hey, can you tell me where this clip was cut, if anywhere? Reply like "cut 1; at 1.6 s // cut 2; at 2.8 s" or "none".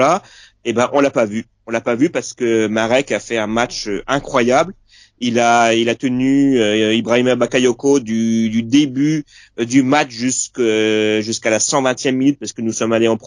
none